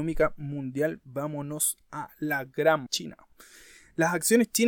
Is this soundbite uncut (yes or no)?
no